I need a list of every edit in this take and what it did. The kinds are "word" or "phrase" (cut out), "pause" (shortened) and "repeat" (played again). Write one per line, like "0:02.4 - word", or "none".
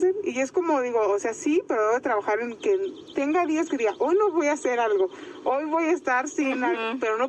none